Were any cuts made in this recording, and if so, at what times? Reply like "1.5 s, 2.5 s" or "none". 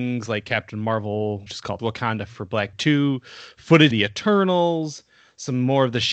1.5 s, 1.8 s, 2.3 s, 2.7 s, 3.9 s